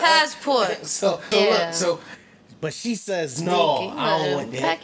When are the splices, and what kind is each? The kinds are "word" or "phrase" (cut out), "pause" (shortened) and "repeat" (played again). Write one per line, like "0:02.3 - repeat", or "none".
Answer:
0:01.3 - word